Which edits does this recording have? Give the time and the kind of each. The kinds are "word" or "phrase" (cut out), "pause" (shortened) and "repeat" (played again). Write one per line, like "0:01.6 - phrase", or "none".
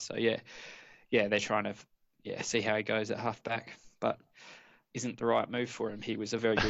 0:04.9 - word